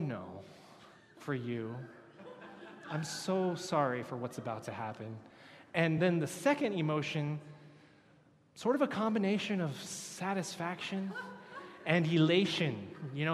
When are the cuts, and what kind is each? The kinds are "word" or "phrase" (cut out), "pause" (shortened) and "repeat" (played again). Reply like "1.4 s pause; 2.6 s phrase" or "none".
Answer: none